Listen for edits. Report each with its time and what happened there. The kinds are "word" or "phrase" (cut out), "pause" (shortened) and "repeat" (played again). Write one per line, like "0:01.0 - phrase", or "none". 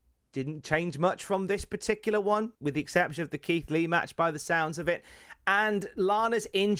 0:02.5 - pause